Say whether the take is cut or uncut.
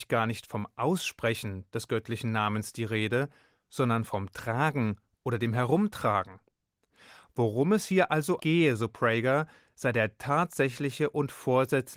cut